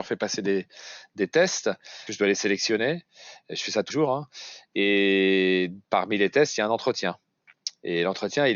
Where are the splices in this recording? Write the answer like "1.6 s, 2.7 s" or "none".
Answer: 2.1 s, 3.9 s